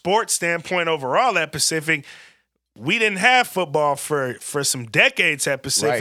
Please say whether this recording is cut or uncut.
uncut